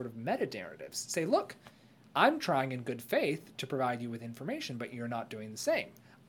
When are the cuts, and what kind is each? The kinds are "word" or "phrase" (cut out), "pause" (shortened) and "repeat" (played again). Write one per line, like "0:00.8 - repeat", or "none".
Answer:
none